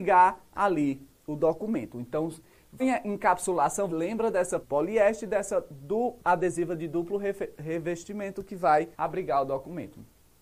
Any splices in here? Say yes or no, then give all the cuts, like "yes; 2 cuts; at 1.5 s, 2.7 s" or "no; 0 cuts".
yes; 5 cuts; at 2.8 s, 3.9 s, 4.6 s, 6.2 s, 8.9 s